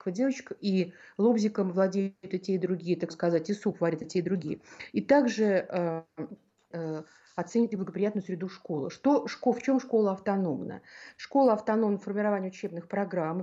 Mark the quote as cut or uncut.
cut